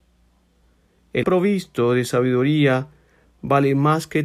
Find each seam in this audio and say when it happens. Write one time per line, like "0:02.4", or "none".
0:01.2